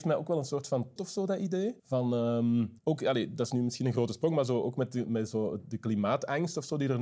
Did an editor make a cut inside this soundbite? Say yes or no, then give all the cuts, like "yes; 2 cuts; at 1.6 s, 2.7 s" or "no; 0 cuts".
yes; 4 cuts; at 1.0 s, 1.8 s, 2.8 s, 5.1 s